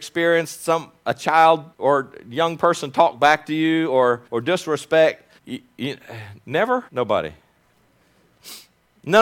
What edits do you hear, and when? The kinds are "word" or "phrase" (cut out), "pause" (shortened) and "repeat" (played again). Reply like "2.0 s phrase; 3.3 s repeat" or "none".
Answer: 1.7 s pause; 4.3 s pause; 5.4 s pause; 6.9 s pause